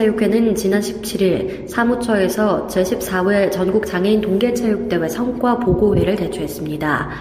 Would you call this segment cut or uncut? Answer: uncut